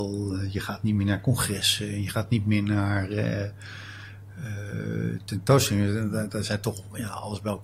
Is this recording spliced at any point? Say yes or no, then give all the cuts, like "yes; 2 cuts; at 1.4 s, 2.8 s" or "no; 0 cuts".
no; 0 cuts